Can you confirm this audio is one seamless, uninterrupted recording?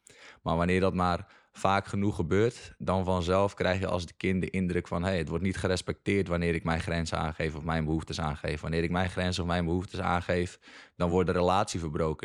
yes; 0 cuts

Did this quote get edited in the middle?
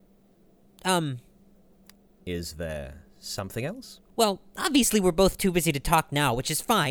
yes; 1 cut; at 4.1 s

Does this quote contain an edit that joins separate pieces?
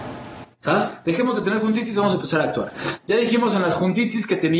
no; 0 cuts

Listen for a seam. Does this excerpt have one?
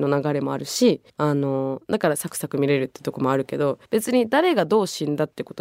yes; 2 cuts; at 1.1 s, 3.8 s

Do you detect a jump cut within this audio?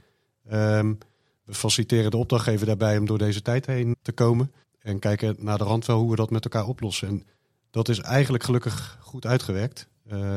yes; 2 cuts; at 3.9 s, 4.6 s

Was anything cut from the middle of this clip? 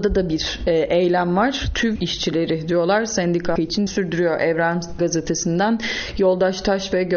yes; 4 cuts; at 2.0 s, 3.6 s, 3.9 s, 5.0 s

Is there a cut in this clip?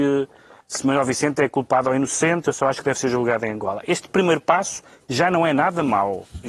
no; 0 cuts

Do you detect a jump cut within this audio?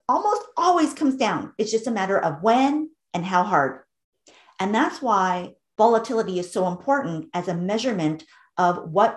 no; 0 cuts

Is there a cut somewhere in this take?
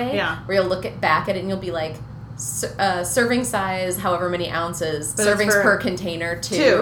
no; 0 cuts

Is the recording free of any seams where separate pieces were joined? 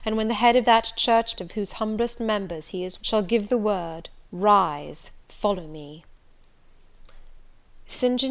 no; 2 cuts; at 1.3 s, 3.0 s

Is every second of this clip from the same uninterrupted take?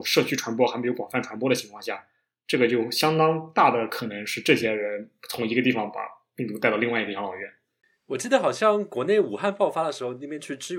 yes; 0 cuts

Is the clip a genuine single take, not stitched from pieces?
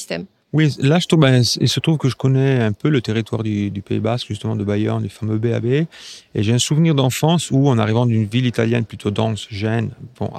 yes; 0 cuts

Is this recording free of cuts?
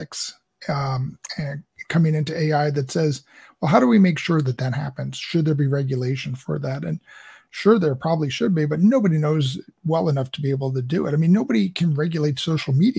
yes; 0 cuts

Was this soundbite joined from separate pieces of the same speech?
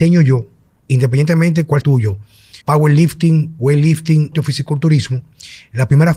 yes; 3 cuts; at 1.8 s, 2.6 s, 4.3 s

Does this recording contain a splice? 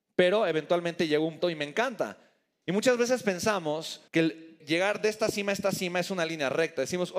yes; 3 cuts; at 1.4 s, 4.1 s, 4.6 s

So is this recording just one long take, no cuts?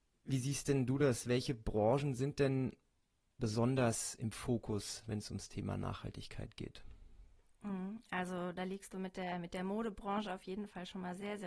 yes; 0 cuts

